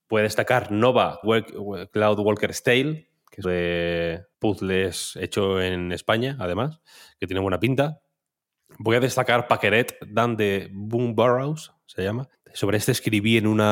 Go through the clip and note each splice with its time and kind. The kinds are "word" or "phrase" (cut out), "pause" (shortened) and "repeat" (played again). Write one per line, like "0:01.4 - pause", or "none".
0:01.2 - word
0:03.4 - phrase
0:04.3 - pause
0:12.3 - pause